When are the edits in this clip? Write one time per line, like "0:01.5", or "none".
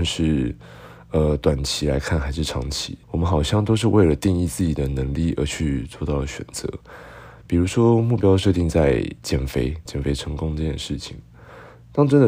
0:03.0
0:09.9